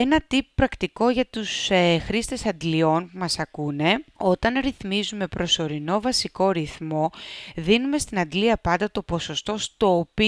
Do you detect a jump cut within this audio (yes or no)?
no